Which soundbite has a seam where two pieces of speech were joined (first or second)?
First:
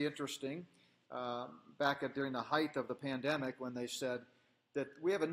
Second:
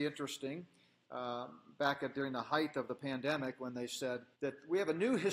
second